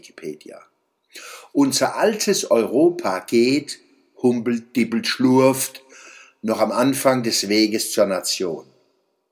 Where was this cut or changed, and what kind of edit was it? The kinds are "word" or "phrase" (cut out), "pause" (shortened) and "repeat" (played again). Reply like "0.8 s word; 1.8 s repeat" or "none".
none